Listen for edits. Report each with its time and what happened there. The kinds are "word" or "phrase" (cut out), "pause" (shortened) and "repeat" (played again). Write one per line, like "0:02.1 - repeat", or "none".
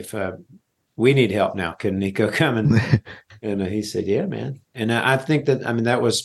0:04.7 - pause